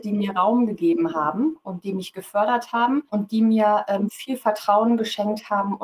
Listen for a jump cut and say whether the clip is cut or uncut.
cut